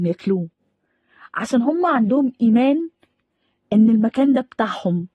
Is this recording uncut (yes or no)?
yes